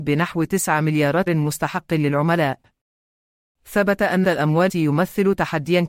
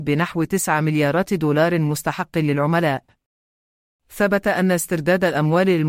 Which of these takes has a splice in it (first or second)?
first